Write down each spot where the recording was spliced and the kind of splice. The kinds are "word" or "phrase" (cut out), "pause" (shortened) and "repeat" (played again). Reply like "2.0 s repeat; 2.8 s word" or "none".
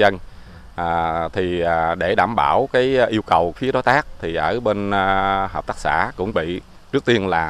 3.5 s word; 6.3 s word